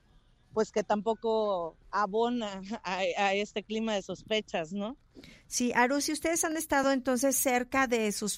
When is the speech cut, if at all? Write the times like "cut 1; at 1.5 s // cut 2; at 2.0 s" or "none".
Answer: cut 1; at 1.8 s